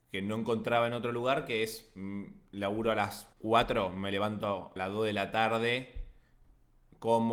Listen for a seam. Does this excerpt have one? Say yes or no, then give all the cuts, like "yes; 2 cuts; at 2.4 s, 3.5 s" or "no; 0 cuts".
yes; 2 cuts; at 3.3 s, 4.8 s